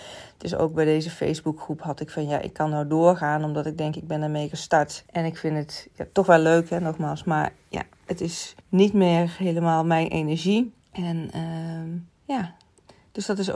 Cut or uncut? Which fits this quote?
cut